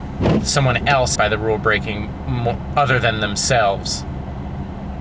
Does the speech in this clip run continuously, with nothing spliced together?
no; 1 cut; at 1.2 s

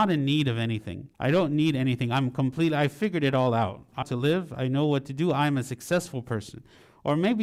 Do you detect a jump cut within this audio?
yes; 2 cuts; at 1.1 s, 4.0 s

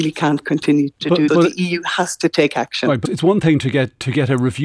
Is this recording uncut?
no; 2 cuts; at 1.3 s, 3.1 s

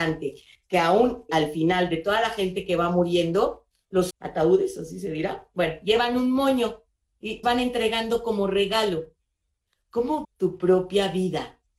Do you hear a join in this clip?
yes; 4 cuts; at 1.3 s, 4.1 s, 7.4 s, 10.2 s

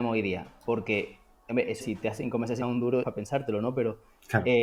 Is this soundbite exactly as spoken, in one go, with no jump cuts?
no; 3 cuts; at 1.8 s, 2.6 s, 3.0 s

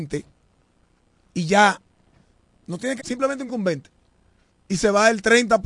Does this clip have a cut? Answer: yes; 3 cuts; at 2.3 s, 3.0 s, 3.5 s

